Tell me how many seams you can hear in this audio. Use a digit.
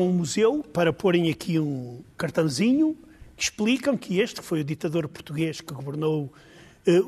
1